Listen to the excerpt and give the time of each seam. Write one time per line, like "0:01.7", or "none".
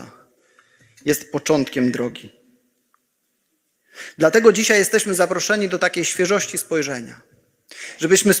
none